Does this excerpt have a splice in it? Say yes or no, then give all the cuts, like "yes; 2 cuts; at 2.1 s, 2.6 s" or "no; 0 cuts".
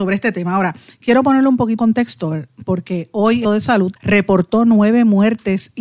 yes; 3 cuts; at 1.8 s, 3.4 s, 4.0 s